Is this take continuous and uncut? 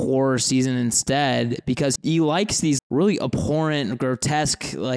no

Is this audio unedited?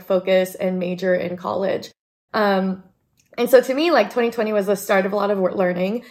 yes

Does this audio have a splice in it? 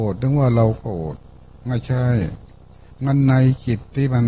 no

